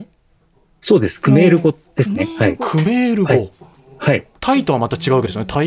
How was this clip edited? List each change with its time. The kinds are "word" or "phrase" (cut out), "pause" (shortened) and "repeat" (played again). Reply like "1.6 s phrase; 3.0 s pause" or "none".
4.4 s pause